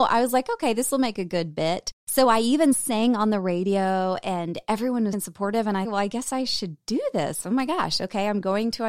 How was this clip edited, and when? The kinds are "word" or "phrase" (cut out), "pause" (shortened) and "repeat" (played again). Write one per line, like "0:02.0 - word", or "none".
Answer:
0:02.0 - pause
0:05.1 - phrase
0:05.8 - phrase